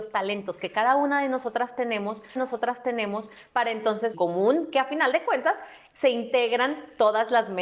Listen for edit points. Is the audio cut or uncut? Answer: cut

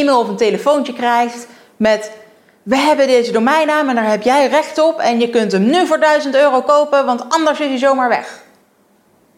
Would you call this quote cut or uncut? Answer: uncut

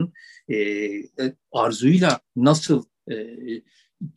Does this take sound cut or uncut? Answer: cut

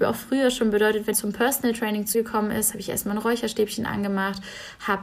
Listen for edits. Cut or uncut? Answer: cut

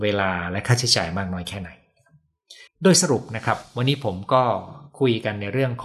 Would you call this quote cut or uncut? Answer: cut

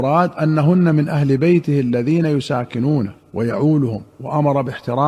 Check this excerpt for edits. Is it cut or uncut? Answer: cut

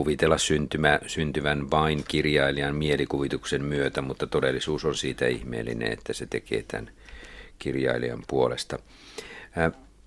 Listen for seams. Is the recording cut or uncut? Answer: uncut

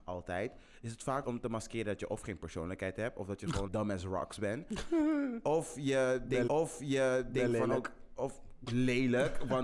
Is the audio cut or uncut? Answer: cut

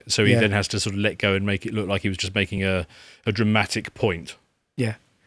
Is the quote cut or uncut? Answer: uncut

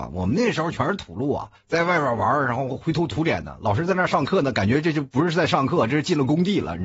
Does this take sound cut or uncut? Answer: cut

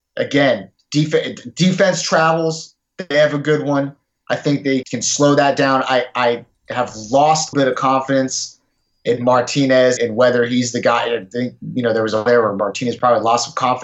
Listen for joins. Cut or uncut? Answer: cut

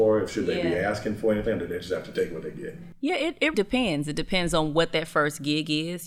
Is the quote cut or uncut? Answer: cut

